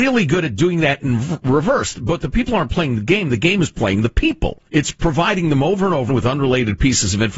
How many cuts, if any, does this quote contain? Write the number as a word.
two